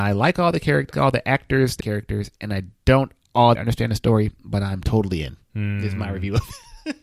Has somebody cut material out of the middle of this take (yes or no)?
yes